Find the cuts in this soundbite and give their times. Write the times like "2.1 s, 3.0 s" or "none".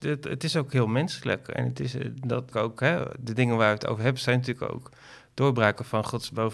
2.5 s

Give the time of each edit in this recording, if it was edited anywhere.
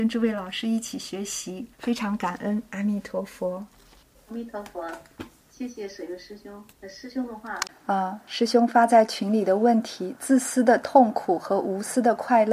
1.7 s, 4.0 s, 6.7 s, 7.7 s

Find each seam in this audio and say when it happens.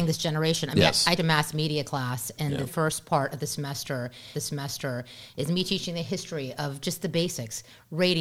1.2 s, 2.7 s, 4.3 s

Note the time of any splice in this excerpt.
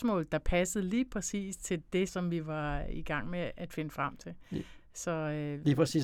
2.1 s

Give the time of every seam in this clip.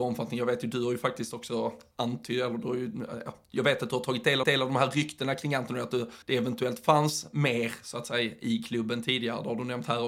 4.4 s, 6.2 s

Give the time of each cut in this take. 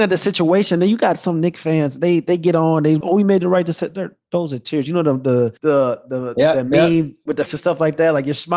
3.0 s, 5.6 s, 7.5 s

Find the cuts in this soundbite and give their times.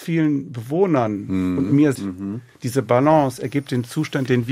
1.9 s

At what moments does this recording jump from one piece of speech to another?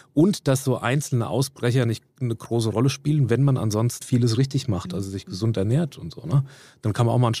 4.0 s

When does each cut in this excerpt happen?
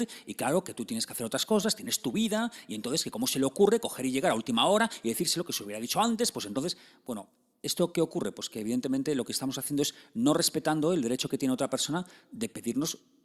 none

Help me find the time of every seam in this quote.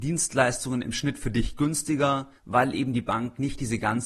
2.4 s

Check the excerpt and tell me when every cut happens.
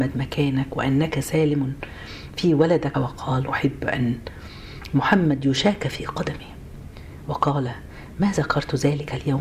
2.9 s, 3.5 s

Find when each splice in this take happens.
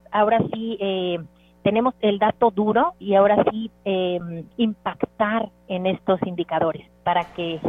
1.9 s, 4.5 s

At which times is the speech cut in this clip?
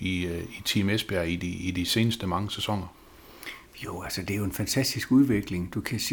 none

